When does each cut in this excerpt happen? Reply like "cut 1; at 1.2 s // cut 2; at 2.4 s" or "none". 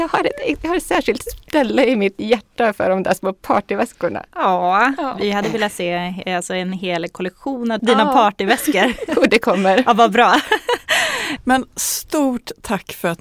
cut 1; at 7.8 s